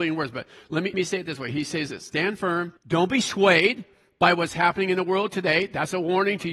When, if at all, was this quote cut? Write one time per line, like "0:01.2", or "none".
0:00.9
0:01.9
0:02.8